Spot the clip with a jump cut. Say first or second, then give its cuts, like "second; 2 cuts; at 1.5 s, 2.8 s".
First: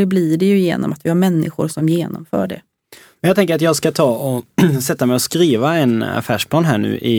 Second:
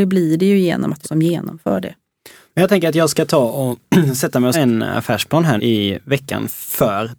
second; 3 cuts; at 1.0 s, 4.5 s, 5.6 s